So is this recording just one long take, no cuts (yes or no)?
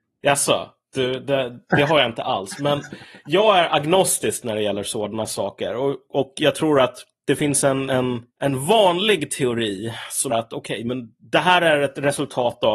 no